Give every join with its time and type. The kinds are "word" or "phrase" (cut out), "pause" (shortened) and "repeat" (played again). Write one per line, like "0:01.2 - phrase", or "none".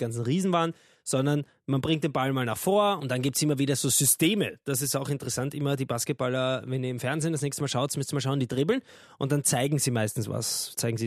none